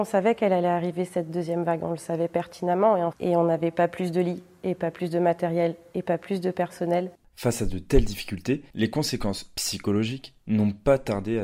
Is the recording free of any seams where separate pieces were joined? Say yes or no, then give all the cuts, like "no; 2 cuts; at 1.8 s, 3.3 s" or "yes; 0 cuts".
no; 1 cut; at 3.1 s